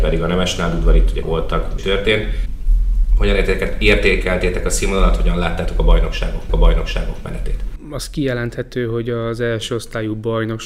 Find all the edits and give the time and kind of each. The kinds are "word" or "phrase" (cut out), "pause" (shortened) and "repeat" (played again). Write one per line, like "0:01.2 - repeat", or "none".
0:01.2 - phrase
0:01.8 - phrase
0:06.5 - repeat

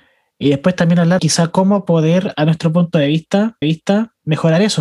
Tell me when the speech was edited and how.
0:01.2 - word
0:03.6 - repeat

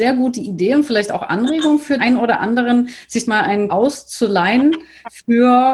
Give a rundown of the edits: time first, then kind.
0:02.0 - word
0:03.3 - word
0:03.7 - word

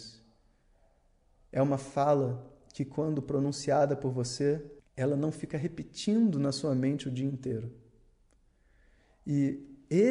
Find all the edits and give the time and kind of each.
0:04.8 - pause

